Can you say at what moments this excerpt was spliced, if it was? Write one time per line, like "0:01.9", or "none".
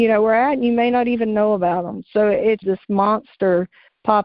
0:02.6